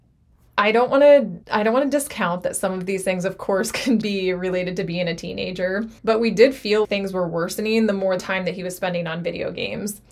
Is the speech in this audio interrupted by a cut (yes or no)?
yes